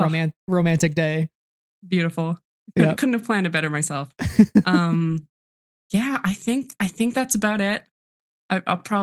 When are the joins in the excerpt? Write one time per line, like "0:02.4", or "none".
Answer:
none